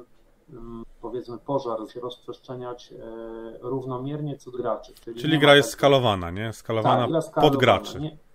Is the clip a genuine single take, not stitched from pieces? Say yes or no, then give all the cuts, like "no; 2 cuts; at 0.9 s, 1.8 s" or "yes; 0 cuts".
no; 4 cuts; at 1.9 s, 4.5 s, 5.0 s, 7.1 s